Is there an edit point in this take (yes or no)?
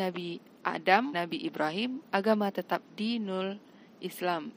yes